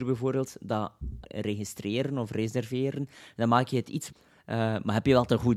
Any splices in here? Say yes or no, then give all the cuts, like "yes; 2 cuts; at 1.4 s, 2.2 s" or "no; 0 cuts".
yes; 2 cuts; at 1.2 s, 4.1 s